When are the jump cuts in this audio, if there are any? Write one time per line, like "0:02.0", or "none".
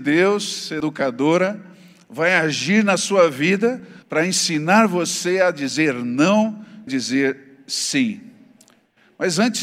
0:04.0
0:06.9

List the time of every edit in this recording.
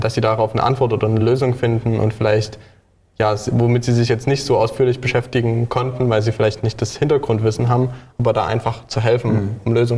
none

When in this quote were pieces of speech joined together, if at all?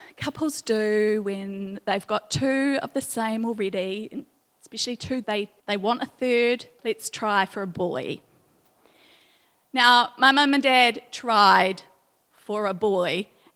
0:05.2
0:05.6
0:06.8

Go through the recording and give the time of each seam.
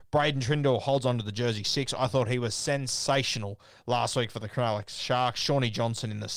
none

